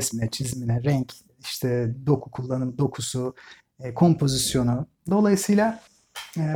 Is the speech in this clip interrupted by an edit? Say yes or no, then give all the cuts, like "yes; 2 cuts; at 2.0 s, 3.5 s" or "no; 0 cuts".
no; 0 cuts